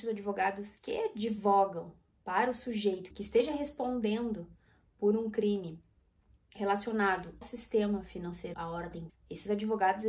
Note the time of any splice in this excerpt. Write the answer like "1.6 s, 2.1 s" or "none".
3.1 s, 7.4 s, 8.5 s, 9.1 s